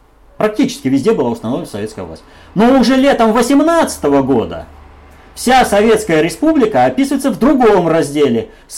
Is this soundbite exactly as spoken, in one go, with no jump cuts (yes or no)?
yes